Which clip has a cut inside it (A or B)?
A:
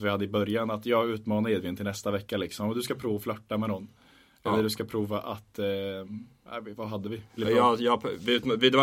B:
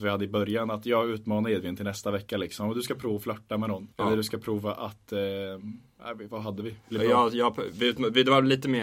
B